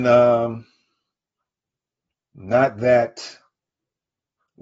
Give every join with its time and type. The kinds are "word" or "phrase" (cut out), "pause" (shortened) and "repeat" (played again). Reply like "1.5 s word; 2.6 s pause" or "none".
none